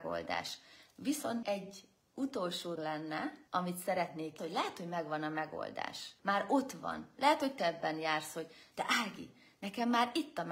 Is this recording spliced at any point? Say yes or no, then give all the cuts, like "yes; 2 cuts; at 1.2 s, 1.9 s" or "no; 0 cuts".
yes; 6 cuts; at 1.4 s, 2.8 s, 3.5 s, 4.4 s, 6.2 s, 7.6 s